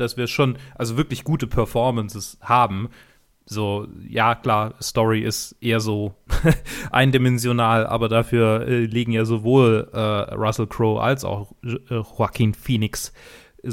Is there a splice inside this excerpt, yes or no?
no